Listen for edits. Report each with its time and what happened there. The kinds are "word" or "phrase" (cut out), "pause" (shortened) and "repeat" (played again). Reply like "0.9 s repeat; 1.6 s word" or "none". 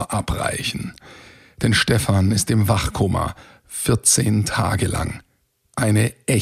none